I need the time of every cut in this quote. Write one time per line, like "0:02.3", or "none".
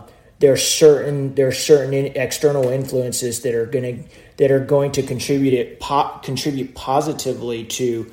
none